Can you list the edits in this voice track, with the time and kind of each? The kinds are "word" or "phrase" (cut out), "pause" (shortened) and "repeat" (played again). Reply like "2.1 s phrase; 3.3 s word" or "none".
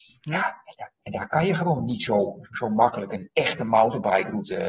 none